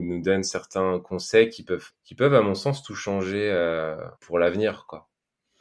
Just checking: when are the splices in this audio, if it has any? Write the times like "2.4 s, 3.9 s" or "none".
1.9 s, 4.2 s